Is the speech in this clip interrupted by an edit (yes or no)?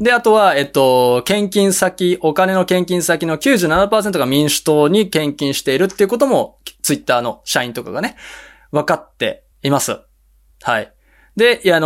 yes